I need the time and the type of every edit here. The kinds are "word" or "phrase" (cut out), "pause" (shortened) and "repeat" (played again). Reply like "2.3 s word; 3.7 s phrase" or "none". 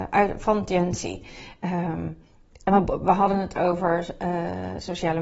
none